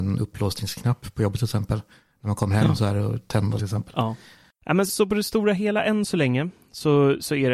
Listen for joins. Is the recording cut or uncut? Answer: cut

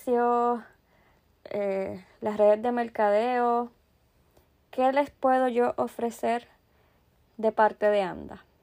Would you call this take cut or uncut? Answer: uncut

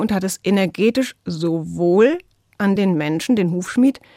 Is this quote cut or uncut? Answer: uncut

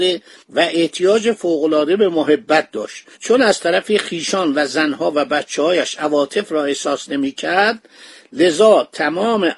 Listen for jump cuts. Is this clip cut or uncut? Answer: cut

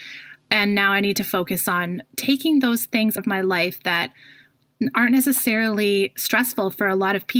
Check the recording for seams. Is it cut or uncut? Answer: cut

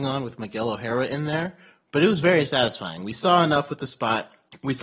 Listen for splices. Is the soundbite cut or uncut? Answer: uncut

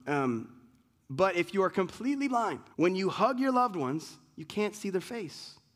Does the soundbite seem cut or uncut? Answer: cut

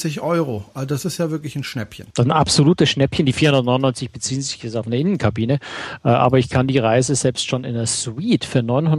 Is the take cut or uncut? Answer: uncut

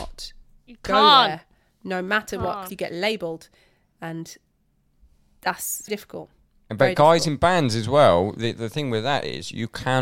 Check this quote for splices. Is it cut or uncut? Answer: cut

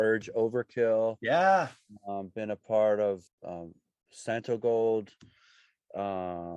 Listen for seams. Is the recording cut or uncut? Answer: cut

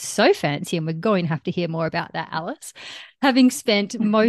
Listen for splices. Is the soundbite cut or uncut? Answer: uncut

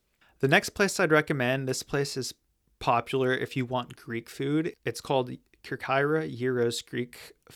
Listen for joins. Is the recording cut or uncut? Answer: uncut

